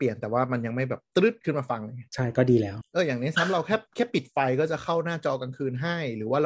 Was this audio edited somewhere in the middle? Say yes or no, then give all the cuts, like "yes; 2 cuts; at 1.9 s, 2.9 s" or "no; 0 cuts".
yes; 1 cut; at 2.1 s